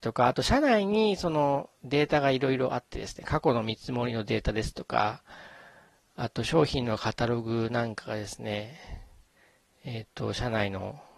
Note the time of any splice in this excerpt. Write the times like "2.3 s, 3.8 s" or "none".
none